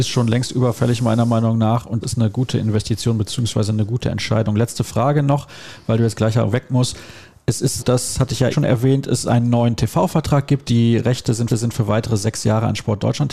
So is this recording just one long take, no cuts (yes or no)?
no